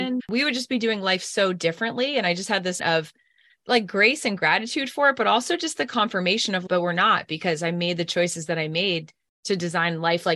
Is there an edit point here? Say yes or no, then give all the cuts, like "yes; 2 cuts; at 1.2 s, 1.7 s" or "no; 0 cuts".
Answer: yes; 1 cut; at 2.8 s